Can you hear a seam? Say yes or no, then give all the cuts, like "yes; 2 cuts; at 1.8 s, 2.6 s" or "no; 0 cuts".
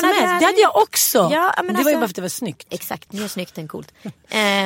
no; 0 cuts